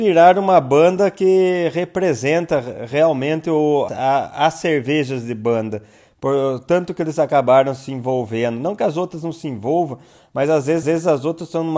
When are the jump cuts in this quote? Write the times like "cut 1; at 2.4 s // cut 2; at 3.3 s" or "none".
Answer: cut 1; at 3.9 s // cut 2; at 10.8 s